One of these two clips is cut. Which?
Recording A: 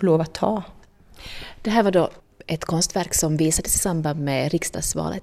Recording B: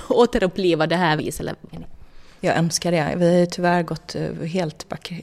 B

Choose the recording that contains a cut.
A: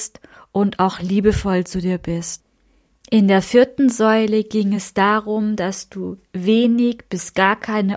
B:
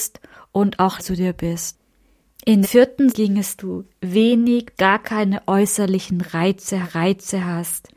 B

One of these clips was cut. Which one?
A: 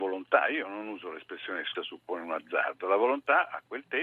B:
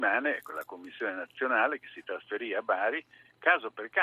A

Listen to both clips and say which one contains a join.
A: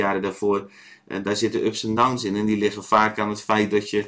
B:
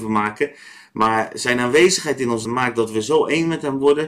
B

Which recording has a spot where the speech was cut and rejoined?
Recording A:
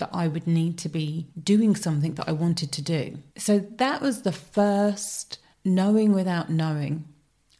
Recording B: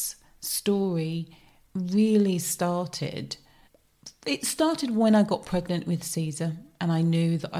A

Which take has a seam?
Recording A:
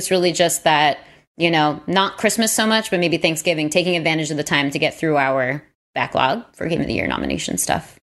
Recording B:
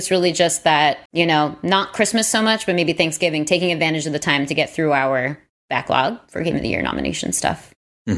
B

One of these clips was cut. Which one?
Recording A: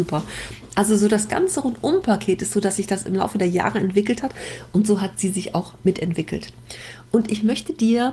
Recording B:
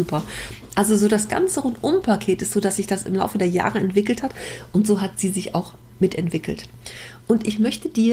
A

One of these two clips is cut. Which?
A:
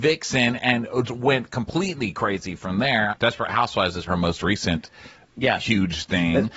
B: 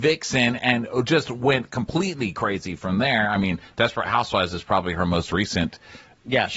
A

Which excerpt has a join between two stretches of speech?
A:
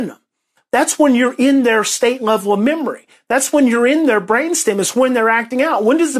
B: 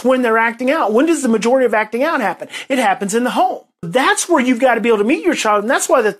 B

